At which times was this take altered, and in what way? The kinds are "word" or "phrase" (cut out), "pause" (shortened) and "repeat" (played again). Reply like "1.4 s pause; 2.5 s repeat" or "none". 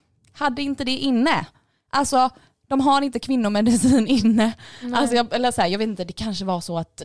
none